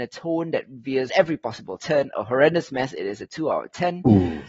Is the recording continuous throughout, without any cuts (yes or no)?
no